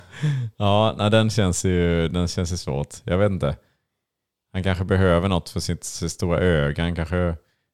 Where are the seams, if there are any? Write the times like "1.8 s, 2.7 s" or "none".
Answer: none